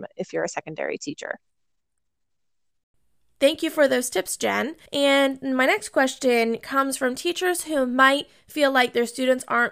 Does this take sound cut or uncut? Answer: cut